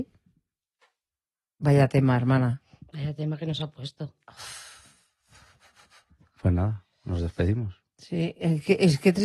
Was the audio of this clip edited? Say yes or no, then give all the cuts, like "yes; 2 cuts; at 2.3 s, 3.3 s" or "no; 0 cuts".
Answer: no; 0 cuts